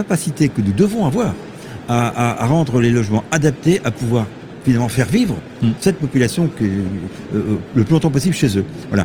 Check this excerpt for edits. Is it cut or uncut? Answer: uncut